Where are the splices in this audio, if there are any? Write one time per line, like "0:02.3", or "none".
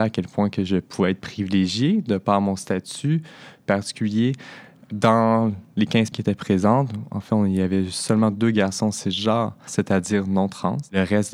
0:06.1